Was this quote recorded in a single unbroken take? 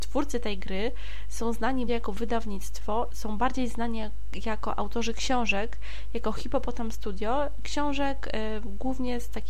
no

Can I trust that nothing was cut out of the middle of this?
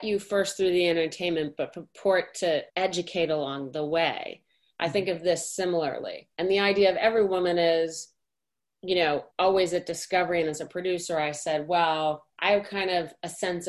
no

